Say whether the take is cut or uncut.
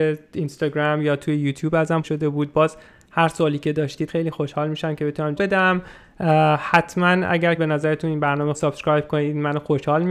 cut